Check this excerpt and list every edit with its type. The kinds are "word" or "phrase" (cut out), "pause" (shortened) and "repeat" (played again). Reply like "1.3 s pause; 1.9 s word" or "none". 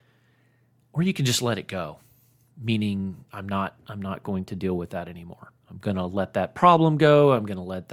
3.3 s word; 5.6 s pause